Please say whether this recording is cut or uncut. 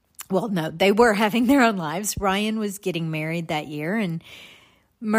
uncut